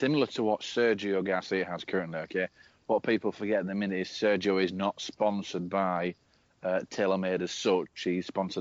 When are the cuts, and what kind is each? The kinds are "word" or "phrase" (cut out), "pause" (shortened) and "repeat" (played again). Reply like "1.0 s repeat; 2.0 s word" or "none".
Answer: none